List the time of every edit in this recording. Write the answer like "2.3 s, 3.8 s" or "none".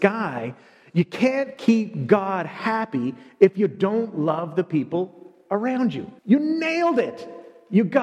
6.2 s

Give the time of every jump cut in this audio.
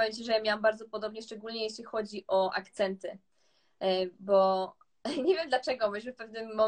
none

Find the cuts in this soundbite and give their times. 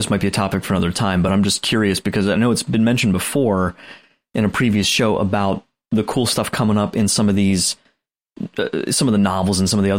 none

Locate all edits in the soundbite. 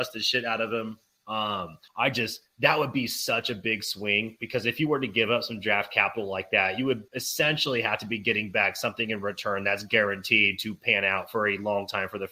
1.9 s, 7.1 s

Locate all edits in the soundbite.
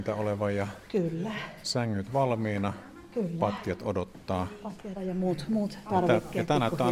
2.1 s, 5.0 s

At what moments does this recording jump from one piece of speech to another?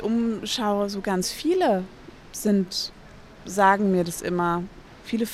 none

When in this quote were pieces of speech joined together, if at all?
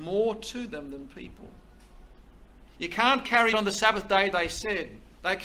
3.5 s

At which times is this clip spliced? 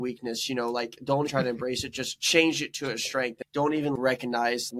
1.3 s

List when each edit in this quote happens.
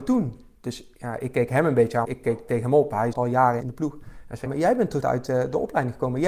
2.0 s, 3.1 s, 3.6 s, 4.5 s, 5.0 s

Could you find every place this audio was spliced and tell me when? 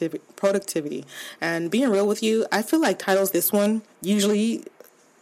3.3 s, 3.9 s

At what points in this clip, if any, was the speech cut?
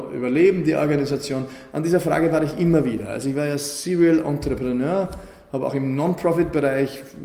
none

